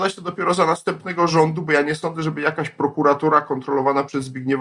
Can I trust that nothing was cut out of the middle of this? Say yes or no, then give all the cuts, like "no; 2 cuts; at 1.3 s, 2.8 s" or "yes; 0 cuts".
yes; 0 cuts